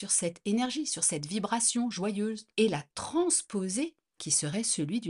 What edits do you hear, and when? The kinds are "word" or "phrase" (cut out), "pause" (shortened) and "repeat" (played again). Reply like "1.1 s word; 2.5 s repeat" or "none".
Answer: 2.5 s pause; 4.2 s phrase

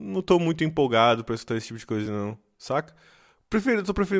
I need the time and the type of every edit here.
none

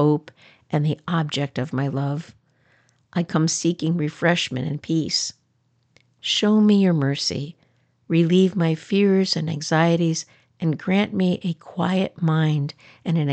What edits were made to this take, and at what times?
none

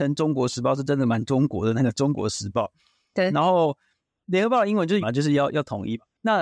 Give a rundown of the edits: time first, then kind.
5.0 s word

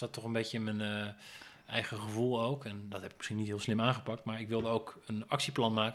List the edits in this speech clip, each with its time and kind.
none

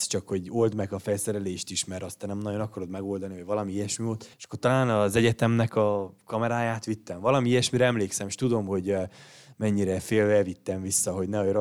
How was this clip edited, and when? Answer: 4.3 s pause

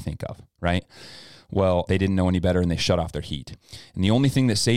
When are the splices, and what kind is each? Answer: 1.9 s word

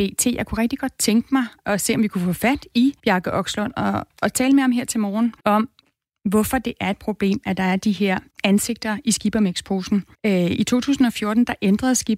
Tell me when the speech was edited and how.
3.0 s pause; 5.4 s pause; 8.3 s pause; 10.1 s pause

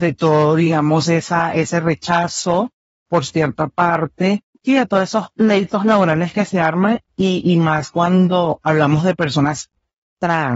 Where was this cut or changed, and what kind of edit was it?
4.5 s word

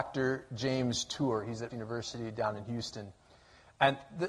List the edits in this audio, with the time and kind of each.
1.7 s word

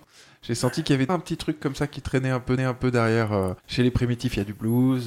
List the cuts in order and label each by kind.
1.1 s word; 2.6 s repeat; 3.6 s pause

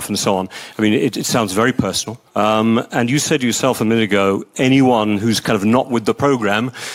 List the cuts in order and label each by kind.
2.3 s pause

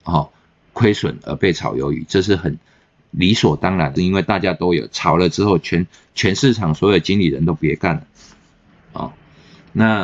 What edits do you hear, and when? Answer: 4.0 s word

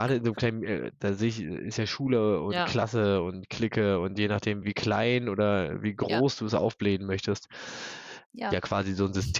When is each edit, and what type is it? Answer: 4.6 s word; 8.3 s word

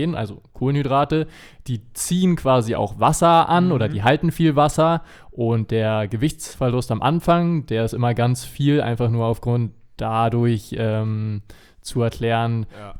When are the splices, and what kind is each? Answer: none

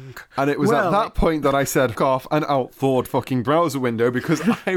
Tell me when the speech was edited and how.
1.9 s word; 3.1 s word

